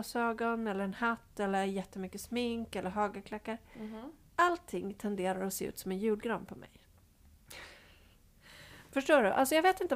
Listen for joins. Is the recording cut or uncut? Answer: uncut